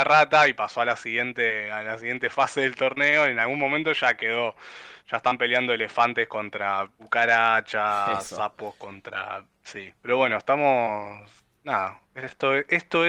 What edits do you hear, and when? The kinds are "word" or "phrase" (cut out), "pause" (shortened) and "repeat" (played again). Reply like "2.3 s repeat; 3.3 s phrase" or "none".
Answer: 10.0 s pause; 12.1 s pause